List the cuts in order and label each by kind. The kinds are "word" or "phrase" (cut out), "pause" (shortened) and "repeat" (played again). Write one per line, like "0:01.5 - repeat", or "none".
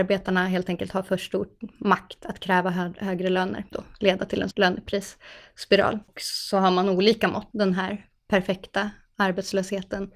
0:03.7 - phrase
0:04.5 - phrase
0:07.5 - phrase